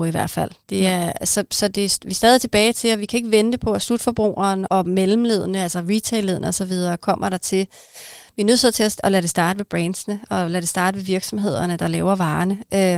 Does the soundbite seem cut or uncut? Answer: cut